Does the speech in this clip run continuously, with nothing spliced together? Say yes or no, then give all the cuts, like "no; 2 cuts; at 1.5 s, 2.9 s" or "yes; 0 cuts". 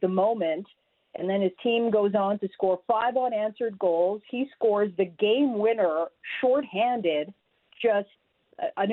yes; 0 cuts